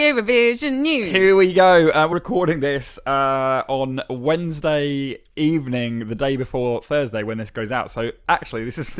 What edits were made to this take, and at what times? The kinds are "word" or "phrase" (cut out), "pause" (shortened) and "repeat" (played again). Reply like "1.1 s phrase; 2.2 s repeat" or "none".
2.1 s word